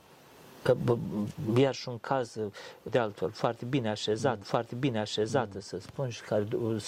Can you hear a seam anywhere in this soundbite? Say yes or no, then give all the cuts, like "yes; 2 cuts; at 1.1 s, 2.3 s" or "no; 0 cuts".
yes; 2 cuts; at 2.9 s, 4.4 s